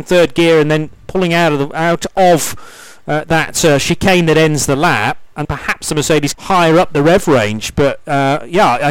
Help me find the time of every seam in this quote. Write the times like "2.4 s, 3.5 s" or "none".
5.4 s, 6.3 s

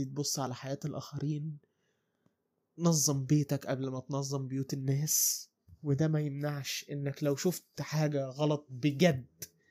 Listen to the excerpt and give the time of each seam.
none

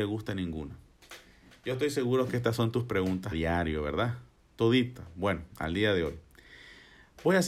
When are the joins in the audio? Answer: 3.3 s

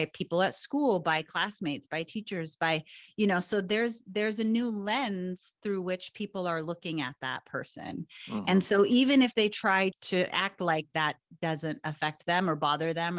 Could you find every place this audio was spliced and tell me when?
none

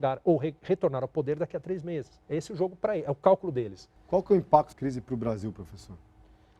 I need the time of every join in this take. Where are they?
2.2 s, 4.7 s

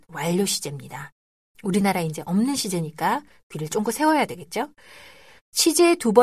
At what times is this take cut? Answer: none

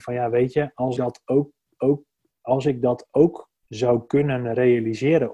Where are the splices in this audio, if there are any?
1.0 s, 1.8 s, 3.6 s

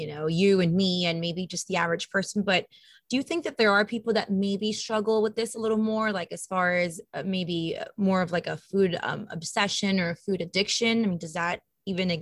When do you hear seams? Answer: none

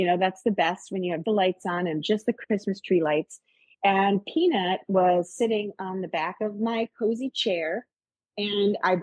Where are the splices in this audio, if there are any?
1.2 s

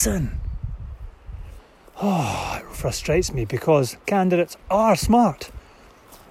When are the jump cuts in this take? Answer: 1.8 s, 2.7 s, 4.0 s

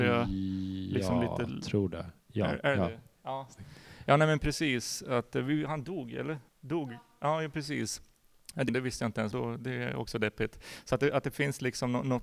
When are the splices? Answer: 2.2 s, 6.5 s, 8.7 s, 9.3 s

